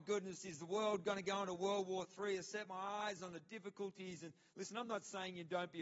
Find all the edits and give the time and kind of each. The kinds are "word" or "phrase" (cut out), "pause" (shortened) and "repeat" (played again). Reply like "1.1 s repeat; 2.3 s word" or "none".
none

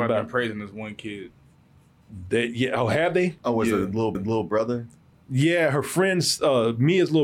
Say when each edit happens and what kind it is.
4.1 s repeat

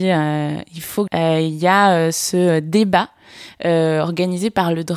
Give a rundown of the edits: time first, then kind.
1.1 s word

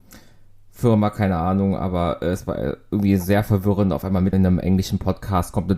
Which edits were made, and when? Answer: 4.3 s word

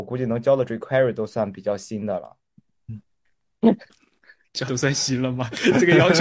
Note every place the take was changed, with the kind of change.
4.7 s word

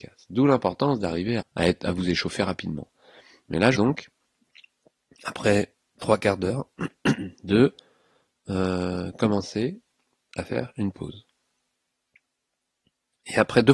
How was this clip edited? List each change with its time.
1.4 s word; 3.7 s phrase

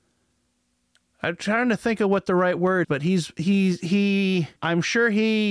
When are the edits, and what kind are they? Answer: 2.8 s word; 4.6 s pause

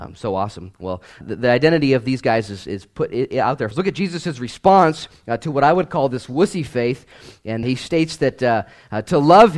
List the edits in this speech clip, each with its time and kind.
1.2 s word; 3.7 s word; 7.6 s word

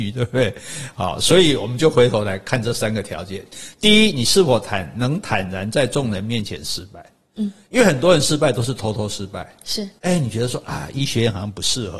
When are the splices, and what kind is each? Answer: 10.0 s pause

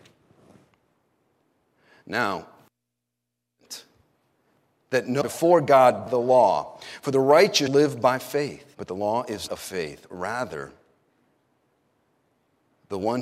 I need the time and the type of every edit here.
5.2 s phrase; 6.1 s word; 7.7 s word; 8.7 s pause; 9.5 s word

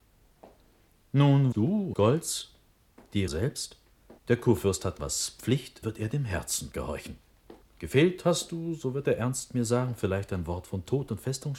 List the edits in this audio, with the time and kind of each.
1.5 s word; 1.9 s word; 3.3 s word; 4.2 s pause; 5.0 s word; 5.8 s phrase; 6.7 s word; 7.6 s pause

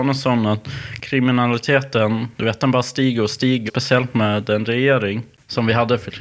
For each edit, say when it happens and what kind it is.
3.7 s word

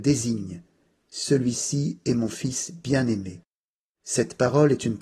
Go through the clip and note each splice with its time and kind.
none

